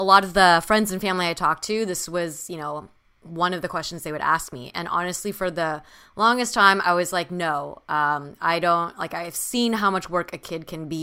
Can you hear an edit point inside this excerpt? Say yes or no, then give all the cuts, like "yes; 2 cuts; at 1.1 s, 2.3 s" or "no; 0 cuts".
no; 0 cuts